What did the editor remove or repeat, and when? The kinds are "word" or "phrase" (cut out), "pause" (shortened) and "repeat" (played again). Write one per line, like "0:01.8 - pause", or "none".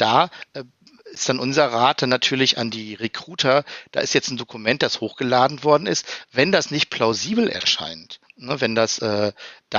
0:08.3 - pause

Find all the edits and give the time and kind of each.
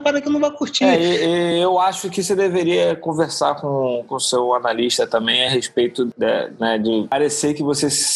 none

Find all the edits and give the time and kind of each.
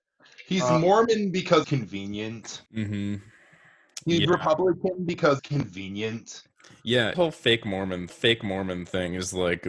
0:01.6 - word
0:02.7 - pause
0:05.4 - word
0:07.1 - word
0:08.1 - repeat

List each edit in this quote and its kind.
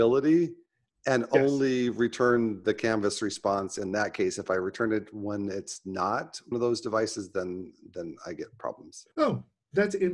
0:06.5 - word
0:09.1 - pause

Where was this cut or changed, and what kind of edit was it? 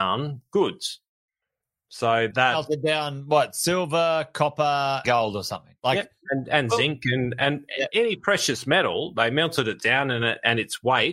0:02.3 - word
0:05.0 - word
0:05.8 - pause

